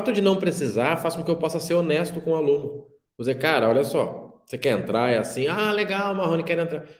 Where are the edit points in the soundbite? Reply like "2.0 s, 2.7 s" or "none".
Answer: 3.1 s